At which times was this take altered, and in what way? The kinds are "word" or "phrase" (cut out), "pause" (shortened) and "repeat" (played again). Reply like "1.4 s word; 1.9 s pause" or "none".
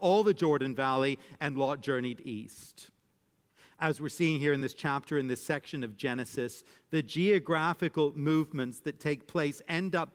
none

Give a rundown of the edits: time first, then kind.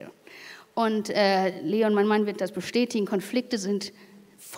none

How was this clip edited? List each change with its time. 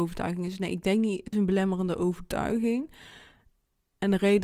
1.3 s word

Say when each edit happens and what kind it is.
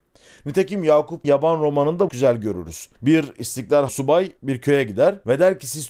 1.2 s word; 2.1 s phrase; 2.9 s pause; 3.9 s phrase; 4.4 s pause

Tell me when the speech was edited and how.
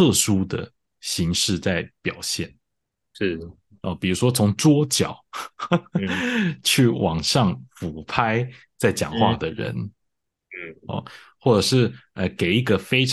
none

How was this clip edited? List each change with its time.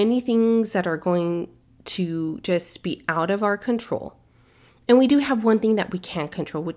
none

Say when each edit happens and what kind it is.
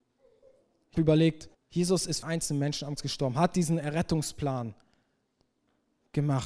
0.9 s word; 1.5 s pause; 2.2 s phrase; 3.0 s word

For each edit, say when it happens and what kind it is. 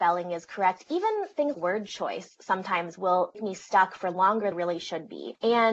1.5 s word; 3.3 s word; 4.5 s phrase

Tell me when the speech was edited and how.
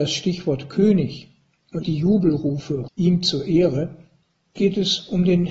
1.8 s word; 2.9 s word; 4.6 s word

